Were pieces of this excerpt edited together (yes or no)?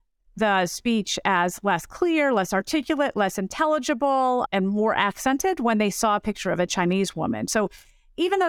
yes